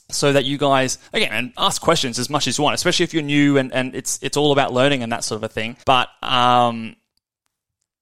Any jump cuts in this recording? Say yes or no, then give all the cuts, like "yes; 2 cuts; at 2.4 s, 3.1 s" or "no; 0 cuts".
yes; 2 cuts; at 1.1 s, 5.8 s